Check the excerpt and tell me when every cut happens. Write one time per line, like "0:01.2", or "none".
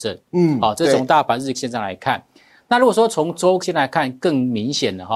0:01.5
0:03.6